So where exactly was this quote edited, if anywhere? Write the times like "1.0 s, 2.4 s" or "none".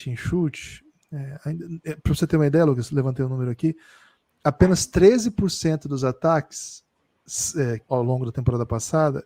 7.9 s